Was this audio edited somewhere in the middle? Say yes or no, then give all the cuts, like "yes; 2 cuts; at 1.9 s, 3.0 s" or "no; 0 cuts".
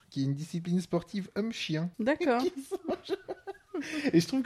yes; 1 cut; at 1.9 s